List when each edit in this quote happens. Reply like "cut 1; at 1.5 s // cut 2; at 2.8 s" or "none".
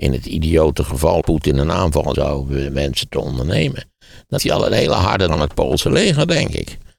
cut 1; at 1.2 s // cut 2; at 2.1 s // cut 3; at 4.4 s // cut 4; at 5.3 s